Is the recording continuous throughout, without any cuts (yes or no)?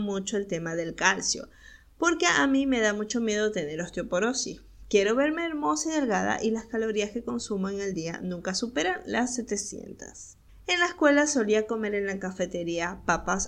yes